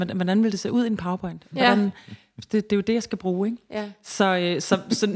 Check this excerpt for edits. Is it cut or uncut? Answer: uncut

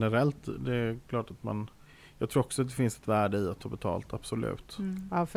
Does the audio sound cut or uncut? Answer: uncut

